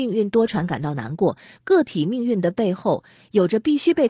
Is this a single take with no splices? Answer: yes; 0 cuts

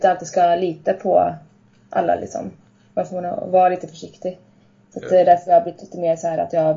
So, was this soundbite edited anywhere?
no; 0 cuts

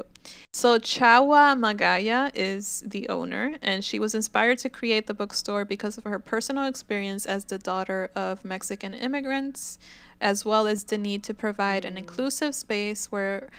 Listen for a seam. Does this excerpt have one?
no; 0 cuts

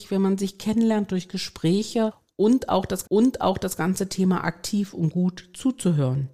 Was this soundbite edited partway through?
yes; 1 cut; at 3.0 s

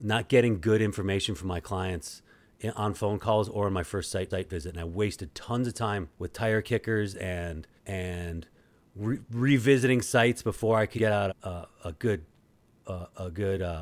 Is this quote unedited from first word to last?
no; 5 cuts; at 4.3 s, 6.1 s, 7.8 s, 11.0 s, 11.3 s

